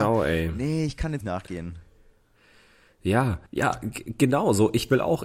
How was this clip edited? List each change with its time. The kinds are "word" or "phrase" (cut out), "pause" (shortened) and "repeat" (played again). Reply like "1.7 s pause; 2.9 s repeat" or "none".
1.2 s word; 3.5 s pause